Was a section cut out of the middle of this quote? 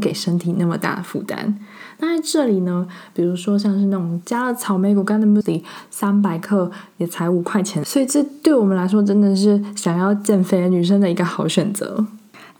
yes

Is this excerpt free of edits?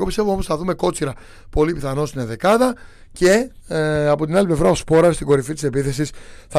yes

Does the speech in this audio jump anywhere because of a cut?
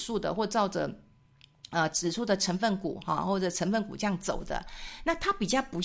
no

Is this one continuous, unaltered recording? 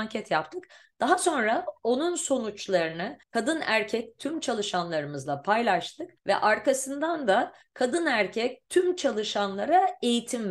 no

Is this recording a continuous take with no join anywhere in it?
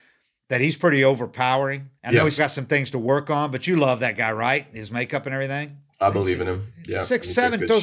no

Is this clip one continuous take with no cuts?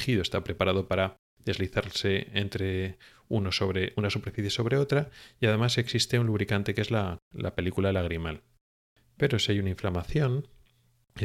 yes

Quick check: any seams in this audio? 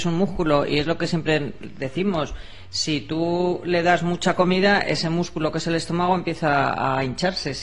no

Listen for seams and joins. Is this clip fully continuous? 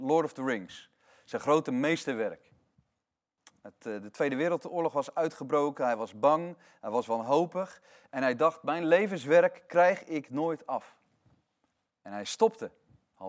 yes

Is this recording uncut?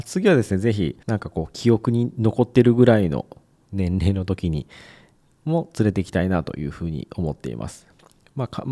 no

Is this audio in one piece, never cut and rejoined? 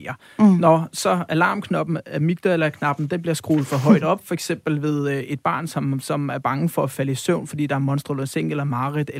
yes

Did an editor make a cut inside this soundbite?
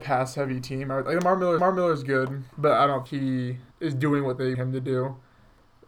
yes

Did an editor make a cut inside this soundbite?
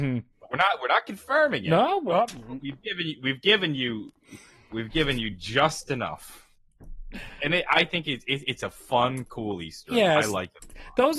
no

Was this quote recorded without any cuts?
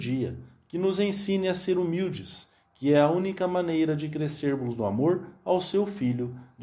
yes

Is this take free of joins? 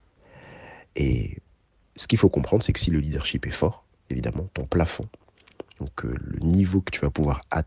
yes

